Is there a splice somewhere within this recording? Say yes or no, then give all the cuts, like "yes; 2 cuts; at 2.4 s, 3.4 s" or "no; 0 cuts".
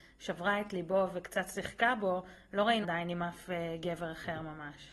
yes; 1 cut; at 2.8 s